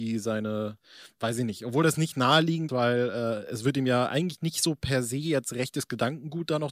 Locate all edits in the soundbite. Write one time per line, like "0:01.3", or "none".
0:02.7